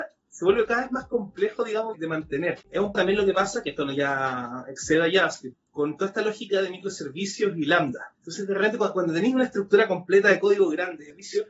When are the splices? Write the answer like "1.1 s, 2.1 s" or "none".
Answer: 1.9 s, 2.6 s, 2.9 s